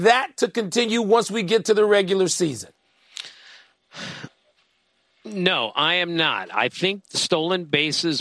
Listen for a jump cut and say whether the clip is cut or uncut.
uncut